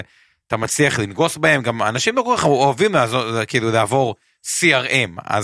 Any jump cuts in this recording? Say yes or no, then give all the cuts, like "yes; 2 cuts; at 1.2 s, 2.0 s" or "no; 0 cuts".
no; 0 cuts